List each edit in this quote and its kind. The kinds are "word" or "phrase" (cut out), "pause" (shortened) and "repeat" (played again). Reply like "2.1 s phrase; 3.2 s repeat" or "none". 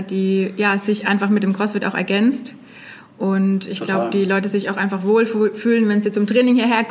none